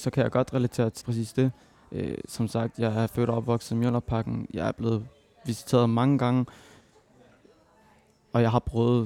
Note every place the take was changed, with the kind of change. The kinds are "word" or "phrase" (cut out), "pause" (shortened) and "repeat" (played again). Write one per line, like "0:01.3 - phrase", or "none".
0:01.0 - word